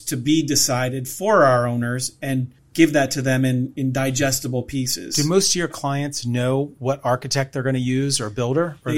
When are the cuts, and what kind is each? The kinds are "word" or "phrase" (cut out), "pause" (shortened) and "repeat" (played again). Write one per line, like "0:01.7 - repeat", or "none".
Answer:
0:02.6 - pause